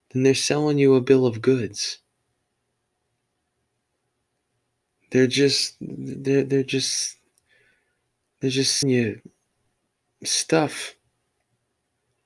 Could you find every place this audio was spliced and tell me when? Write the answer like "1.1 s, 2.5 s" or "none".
8.8 s

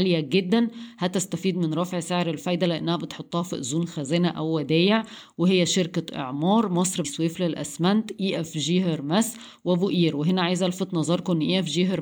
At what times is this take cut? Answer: 7.0 s

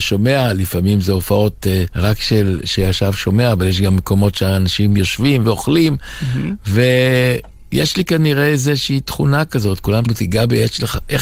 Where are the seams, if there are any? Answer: 1.9 s, 5.4 s, 10.1 s

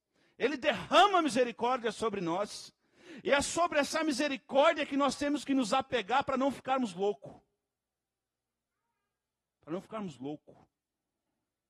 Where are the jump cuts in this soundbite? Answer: none

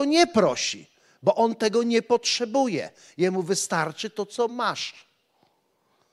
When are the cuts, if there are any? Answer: none

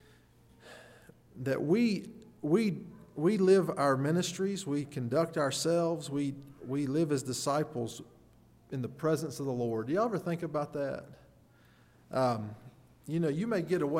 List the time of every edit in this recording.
none

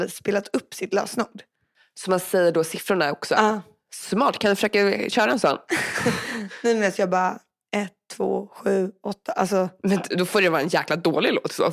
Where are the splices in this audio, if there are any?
none

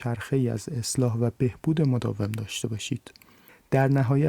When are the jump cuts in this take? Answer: none

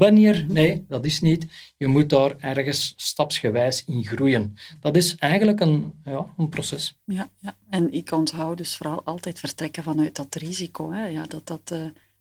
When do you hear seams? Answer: none

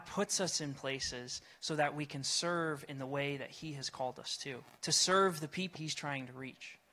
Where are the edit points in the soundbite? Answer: 4.8 s, 5.8 s

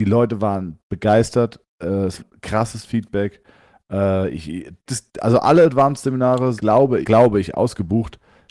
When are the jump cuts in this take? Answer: 2.2 s, 4.9 s, 6.6 s, 7.0 s

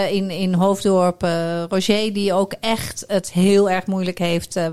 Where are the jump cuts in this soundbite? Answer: none

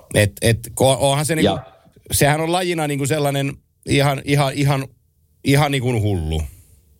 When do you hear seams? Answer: none

